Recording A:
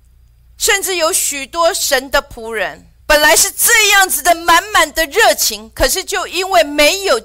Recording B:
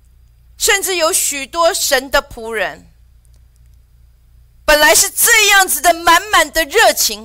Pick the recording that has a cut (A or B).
A